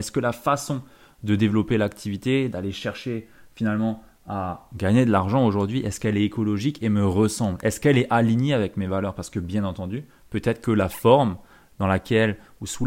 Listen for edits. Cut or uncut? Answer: uncut